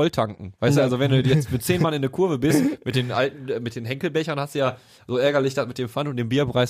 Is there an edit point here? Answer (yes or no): no